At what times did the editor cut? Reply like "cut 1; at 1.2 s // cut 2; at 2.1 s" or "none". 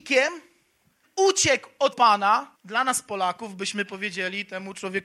cut 1; at 1.0 s // cut 2; at 1.9 s // cut 3; at 2.5 s